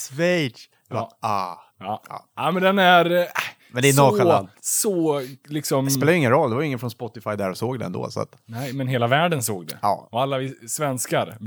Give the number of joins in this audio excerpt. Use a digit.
2